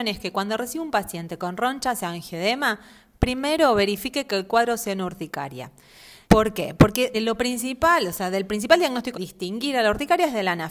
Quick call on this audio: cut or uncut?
cut